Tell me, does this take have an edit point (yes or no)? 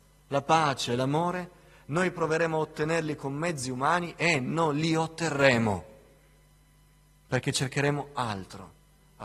no